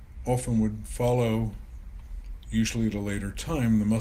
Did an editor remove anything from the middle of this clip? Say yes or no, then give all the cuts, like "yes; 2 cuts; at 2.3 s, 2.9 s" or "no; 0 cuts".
no; 0 cuts